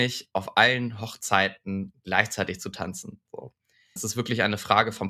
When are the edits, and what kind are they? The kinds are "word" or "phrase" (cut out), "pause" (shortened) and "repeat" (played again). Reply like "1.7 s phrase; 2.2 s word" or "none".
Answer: 4.0 s word

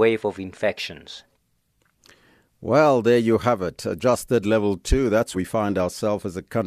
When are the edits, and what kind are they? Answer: 4.4 s word; 5.3 s word

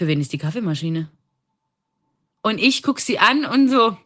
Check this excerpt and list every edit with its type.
none

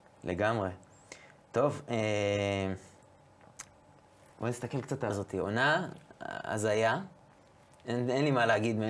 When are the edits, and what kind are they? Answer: 5.1 s word

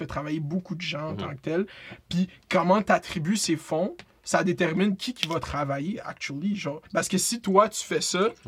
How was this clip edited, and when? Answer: 6.9 s pause

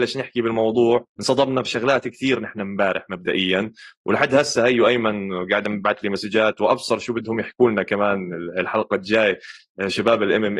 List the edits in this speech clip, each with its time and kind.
1.1 s pause

